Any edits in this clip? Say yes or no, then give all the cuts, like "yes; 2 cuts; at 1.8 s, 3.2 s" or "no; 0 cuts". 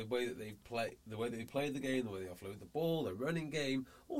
no; 0 cuts